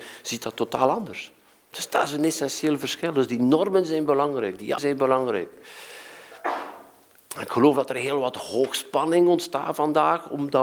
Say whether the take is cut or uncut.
cut